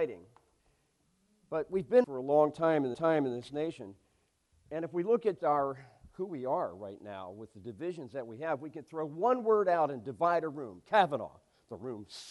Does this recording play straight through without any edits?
no; 3 cuts; at 2.0 s, 2.9 s, 5.4 s

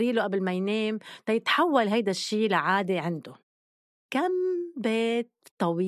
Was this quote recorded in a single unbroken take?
yes; 0 cuts

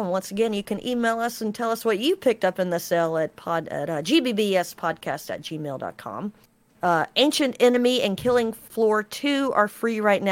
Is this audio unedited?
yes; 0 cuts

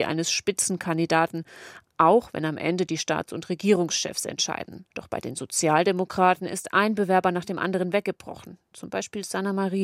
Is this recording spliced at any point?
yes; 1 cut; at 4.9 s

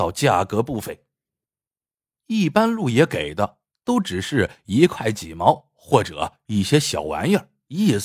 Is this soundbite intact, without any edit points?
yes; 0 cuts

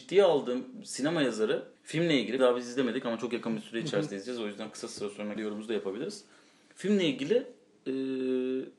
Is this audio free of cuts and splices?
no; 3 cuts; at 1.8 s, 2.4 s, 5.4 s

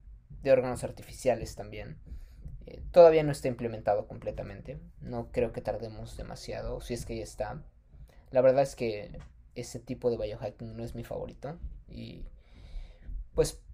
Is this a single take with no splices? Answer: yes; 0 cuts

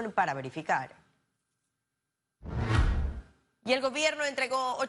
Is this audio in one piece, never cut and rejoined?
yes; 0 cuts

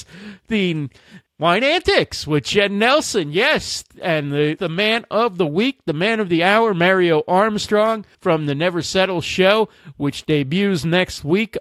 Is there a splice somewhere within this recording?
yes; 3 cuts; at 1.3 s, 4.6 s, 8.1 s

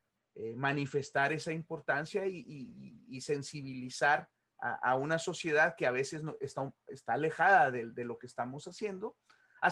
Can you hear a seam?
no; 0 cuts

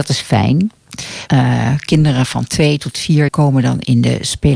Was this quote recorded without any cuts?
no; 2 cuts; at 1.3 s, 3.3 s

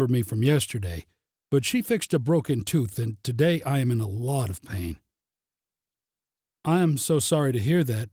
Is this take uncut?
yes; 0 cuts

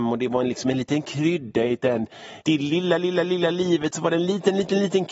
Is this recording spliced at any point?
yes; 1 cut; at 2.4 s

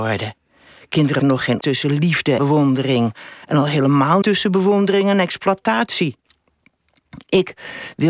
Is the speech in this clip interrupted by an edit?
yes; 5 cuts; at 1.2 s, 1.6 s, 2.4 s, 3.4 s, 4.2 s

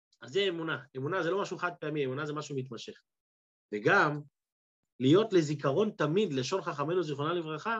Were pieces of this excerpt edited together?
no; 0 cuts

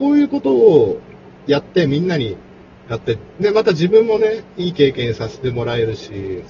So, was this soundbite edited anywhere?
no; 0 cuts

